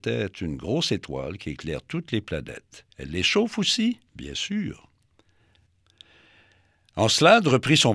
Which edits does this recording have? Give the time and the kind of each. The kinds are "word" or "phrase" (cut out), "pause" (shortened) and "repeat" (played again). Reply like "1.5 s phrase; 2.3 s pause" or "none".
2.9 s pause; 4.1 s pause